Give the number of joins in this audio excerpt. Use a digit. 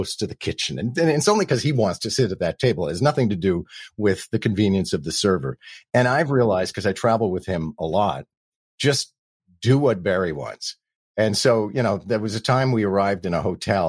0